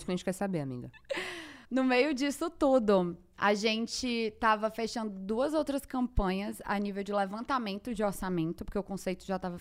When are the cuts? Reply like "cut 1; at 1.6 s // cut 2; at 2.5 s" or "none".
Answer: cut 1; at 1.6 s